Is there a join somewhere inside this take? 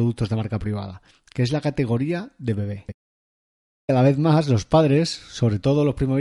no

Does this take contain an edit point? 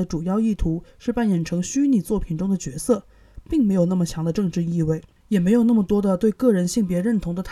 no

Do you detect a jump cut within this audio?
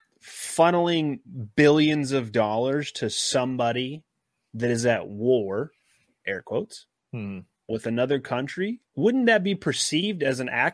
no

